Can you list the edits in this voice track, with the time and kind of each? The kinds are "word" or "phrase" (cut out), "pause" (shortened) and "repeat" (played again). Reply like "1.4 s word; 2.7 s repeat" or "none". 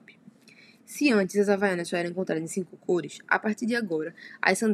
none